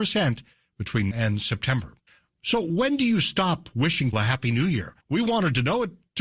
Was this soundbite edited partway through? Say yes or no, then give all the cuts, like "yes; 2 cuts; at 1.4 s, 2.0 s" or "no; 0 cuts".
yes; 4 cuts; at 1.1 s, 2.1 s, 4.1 s, 5.0 s